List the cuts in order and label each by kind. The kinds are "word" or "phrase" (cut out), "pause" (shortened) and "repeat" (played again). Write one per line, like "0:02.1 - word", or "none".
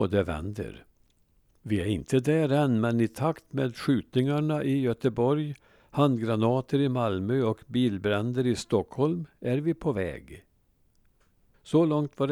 none

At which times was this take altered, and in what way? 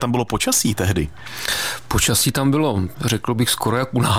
0:02.9 - word

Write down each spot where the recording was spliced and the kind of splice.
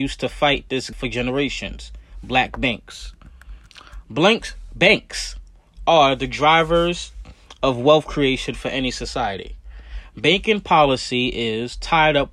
0:00.9 - word

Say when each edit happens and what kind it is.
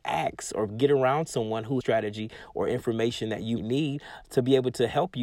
0:01.8 - word
0:03.6 - word

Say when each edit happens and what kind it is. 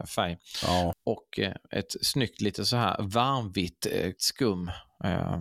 0:04.2 - word

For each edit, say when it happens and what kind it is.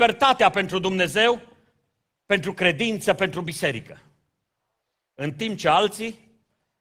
none

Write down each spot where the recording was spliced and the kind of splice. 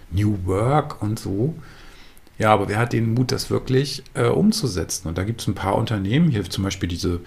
none

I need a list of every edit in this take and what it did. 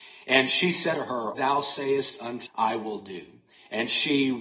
0:00.9 - word
0:01.3 - phrase
0:02.5 - word

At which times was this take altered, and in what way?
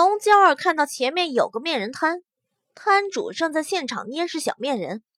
none

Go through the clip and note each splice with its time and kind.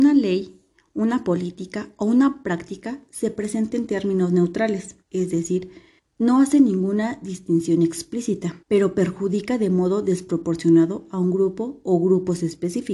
0:05.0 - pause
0:06.0 - pause
0:08.6 - pause

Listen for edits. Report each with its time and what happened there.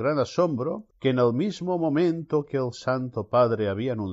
0:00.9 - pause

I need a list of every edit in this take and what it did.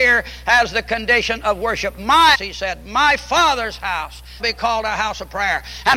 0:02.3 - word
0:04.4 - word

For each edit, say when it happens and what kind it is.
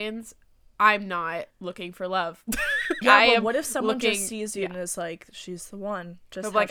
0:01.5 - pause
0:03.0 - word

